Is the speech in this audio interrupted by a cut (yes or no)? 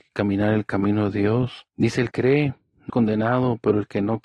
yes